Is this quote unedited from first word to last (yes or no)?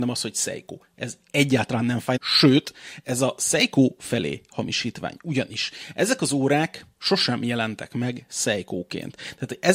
no